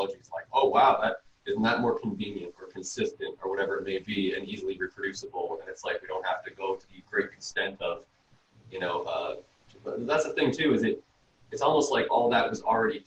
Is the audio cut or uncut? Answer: uncut